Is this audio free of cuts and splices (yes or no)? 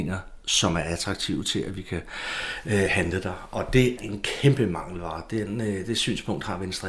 no